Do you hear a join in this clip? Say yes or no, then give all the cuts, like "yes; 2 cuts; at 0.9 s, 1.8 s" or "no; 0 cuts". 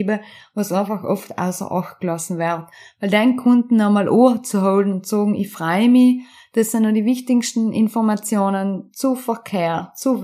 no; 0 cuts